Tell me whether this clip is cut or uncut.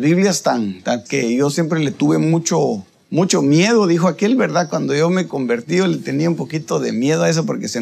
cut